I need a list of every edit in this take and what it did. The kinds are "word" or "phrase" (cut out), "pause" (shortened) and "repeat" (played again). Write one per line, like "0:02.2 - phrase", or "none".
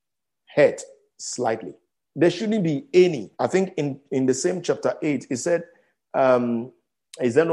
0:01.9 - pause
0:03.3 - pause